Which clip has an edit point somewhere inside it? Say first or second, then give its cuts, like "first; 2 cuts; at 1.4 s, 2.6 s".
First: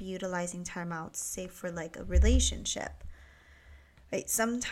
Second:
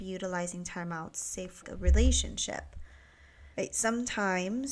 second; 2 cuts; at 1.6 s, 3.5 s